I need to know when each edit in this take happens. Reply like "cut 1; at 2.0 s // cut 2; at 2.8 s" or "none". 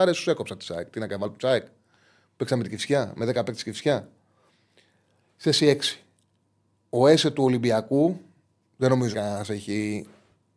cut 1; at 9.1 s